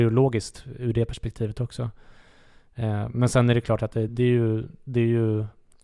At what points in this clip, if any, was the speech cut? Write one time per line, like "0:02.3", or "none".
0:04.1